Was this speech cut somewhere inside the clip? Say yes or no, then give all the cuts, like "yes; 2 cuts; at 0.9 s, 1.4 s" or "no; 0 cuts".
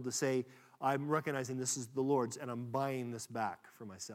no; 0 cuts